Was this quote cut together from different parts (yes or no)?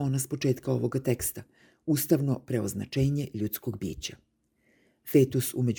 no